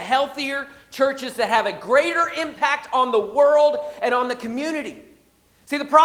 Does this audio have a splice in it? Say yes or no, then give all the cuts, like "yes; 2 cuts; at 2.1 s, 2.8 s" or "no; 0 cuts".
no; 0 cuts